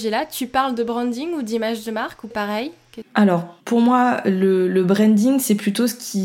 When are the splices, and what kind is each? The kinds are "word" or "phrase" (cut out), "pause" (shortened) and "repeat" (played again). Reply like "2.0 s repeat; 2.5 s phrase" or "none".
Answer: 2.3 s phrase; 3.6 s pause